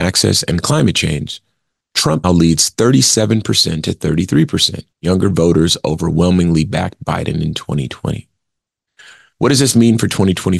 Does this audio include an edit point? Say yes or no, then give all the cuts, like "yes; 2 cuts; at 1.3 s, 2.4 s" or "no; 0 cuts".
yes; 2 cuts; at 2.2 s, 4.9 s